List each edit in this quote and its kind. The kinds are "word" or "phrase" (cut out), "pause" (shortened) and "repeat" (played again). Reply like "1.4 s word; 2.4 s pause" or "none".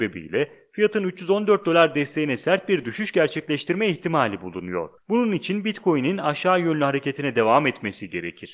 5.0 s pause